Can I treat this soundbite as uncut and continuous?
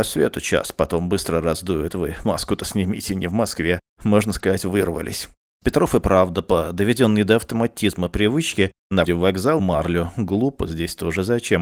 no; 2 cuts; at 9.1 s, 9.6 s

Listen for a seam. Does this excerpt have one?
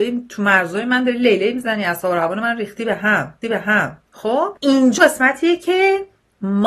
yes; 2 cuts; at 3.4 s, 5.0 s

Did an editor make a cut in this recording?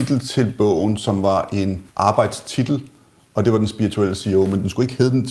yes; 1 cut; at 1.9 s

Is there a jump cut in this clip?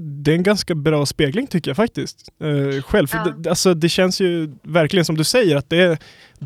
no; 0 cuts

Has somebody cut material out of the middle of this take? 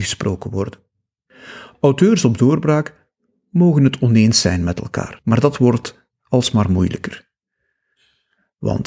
no; 0 cuts

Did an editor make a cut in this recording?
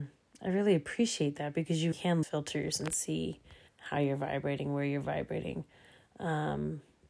yes; 3 cuts; at 1.9 s, 2.2 s, 3.7 s

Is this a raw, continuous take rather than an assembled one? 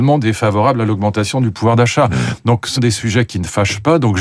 no; 1 cut; at 2.8 s

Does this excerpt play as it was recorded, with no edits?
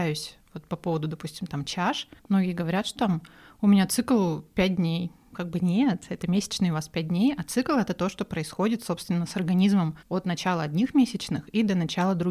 no; 4 cuts; at 2.2 s, 3.0 s, 5.3 s, 10.0 s

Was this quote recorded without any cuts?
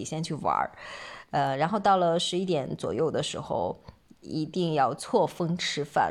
yes; 0 cuts

